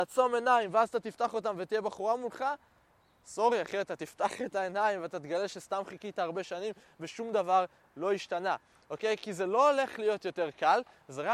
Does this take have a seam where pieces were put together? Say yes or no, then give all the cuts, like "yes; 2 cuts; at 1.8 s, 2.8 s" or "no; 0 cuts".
no; 0 cuts